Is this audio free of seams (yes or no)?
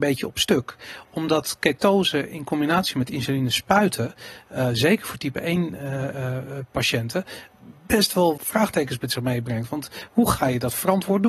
no